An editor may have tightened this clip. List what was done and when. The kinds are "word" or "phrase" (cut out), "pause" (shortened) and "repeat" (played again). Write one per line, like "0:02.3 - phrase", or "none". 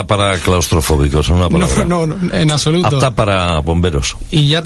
0:03.6 - word

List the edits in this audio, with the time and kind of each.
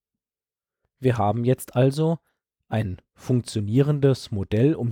none

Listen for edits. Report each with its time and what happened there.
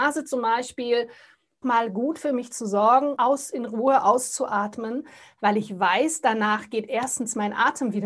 0:01.6 - word
0:03.1 - word

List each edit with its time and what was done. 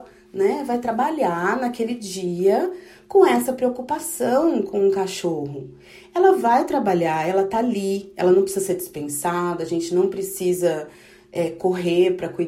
none

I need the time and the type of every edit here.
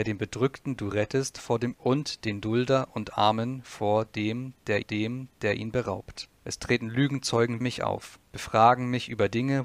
0:01.7 - word
0:04.8 - repeat
0:06.3 - pause
0:07.6 - word
0:08.3 - pause

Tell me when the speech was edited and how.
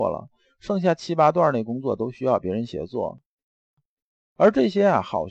none

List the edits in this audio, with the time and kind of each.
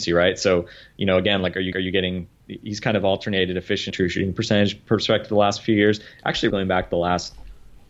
0:01.7 - repeat
0:03.9 - phrase
0:06.5 - word

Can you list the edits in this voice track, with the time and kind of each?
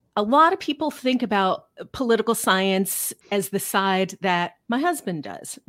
0:03.2 - pause

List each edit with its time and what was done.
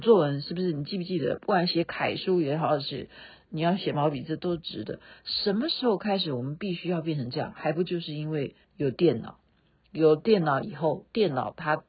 0:08.6 - pause

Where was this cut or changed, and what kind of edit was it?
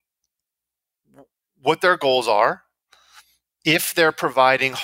none

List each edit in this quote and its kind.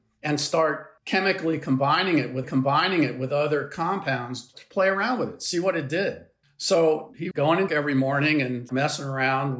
0:01.0 - pause
0:02.4 - repeat
0:06.4 - pause
0:07.3 - word
0:07.7 - word
0:08.7 - word

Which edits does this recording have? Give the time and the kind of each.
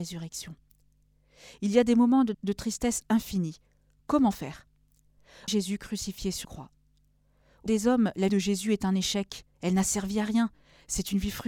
0:02.3 - word
0:05.5 - word
0:06.4 - word
0:07.7 - word
0:08.3 - word
0:09.5 - pause

